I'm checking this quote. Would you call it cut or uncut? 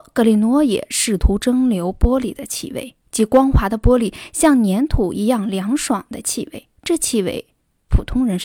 cut